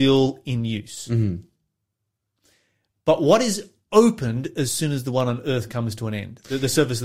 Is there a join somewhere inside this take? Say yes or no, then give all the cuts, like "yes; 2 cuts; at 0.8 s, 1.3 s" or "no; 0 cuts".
no; 0 cuts